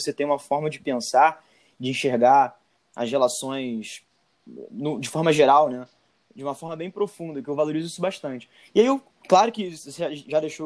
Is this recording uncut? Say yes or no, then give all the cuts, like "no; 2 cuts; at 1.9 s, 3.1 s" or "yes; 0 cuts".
yes; 0 cuts